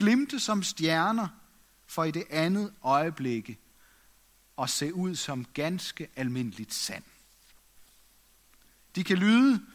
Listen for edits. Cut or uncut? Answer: uncut